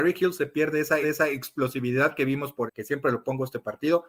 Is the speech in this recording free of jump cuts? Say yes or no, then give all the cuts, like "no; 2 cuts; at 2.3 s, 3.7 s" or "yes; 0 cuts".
no; 2 cuts; at 1.0 s, 2.7 s